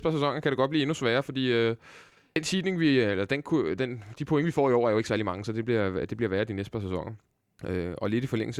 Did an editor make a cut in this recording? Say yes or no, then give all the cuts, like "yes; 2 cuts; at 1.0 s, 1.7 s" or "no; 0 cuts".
no; 0 cuts